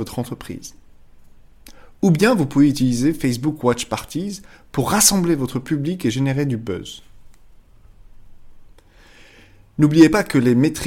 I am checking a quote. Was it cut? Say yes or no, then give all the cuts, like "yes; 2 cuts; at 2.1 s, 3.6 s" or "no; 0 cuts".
no; 0 cuts